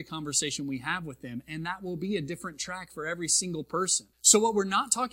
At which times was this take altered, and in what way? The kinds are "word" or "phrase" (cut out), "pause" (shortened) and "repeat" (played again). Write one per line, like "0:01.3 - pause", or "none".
0:04.1 - pause